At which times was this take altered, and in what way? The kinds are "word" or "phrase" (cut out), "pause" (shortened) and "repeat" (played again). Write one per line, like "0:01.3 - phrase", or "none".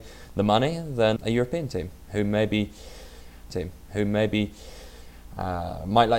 0:01.2 - word
0:03.5 - repeat